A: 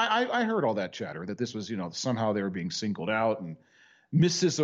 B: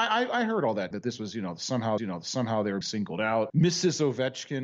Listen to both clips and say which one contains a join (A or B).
B